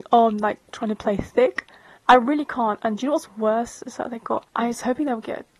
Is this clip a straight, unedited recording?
no; 2 cuts; at 2.0 s, 4.5 s

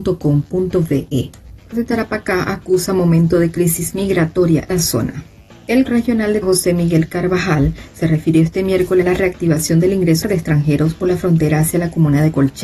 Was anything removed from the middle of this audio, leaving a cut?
yes; 6 cuts; at 1.7 s, 4.7 s, 5.9 s, 6.4 s, 9.0 s, 10.2 s

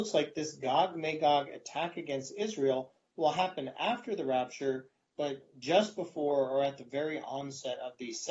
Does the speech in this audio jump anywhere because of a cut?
no; 0 cuts

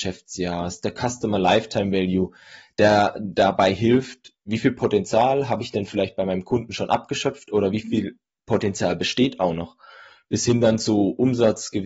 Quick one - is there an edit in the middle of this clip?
no; 0 cuts

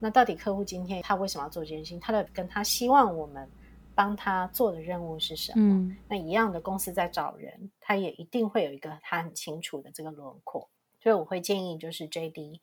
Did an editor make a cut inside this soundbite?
yes; 2 cuts; at 2.3 s, 10.8 s

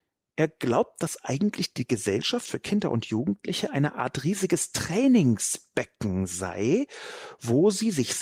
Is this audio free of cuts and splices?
yes; 0 cuts

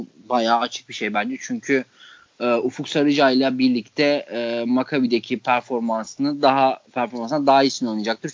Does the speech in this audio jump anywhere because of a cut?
no; 0 cuts

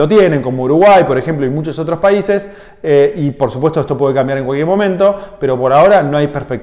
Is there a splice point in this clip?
no; 0 cuts

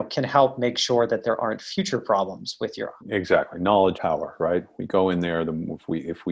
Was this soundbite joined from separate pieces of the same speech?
yes; 2 cuts; at 3.0 s, 3.9 s

